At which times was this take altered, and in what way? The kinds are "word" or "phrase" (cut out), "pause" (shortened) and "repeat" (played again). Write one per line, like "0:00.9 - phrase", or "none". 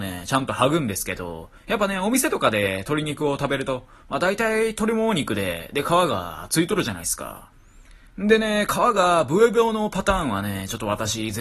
none

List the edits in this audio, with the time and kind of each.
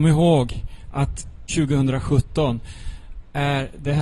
0:01.5 - word

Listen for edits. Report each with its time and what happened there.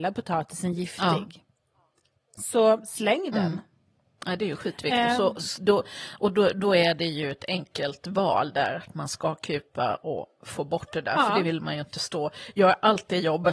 none

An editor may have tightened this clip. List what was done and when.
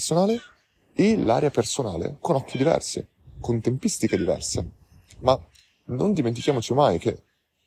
none

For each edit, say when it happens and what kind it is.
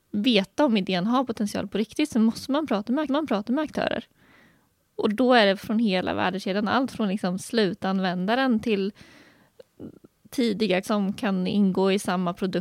0:03.1 - repeat
0:05.6 - phrase
0:10.8 - word

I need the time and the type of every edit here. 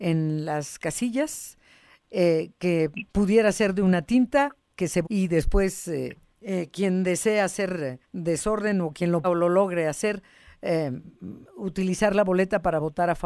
0:03.1 - pause
0:05.0 - word
0:06.3 - pause
0:08.0 - pause
0:09.2 - word

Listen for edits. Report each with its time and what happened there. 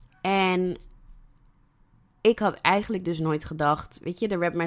none

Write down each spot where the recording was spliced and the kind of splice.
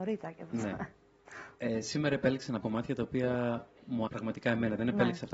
0:01.5 - pause
0:02.6 - word
0:04.1 - word

